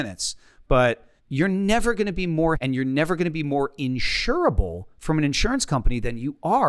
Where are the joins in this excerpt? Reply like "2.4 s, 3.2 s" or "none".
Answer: 1.2 s, 2.5 s